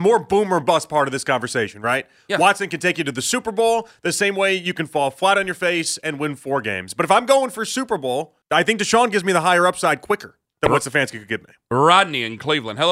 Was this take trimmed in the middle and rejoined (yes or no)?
yes